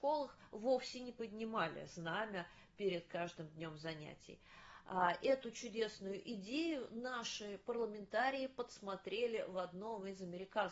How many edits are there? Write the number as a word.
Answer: zero